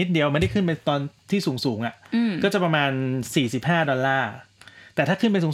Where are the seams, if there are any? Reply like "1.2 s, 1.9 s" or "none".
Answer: none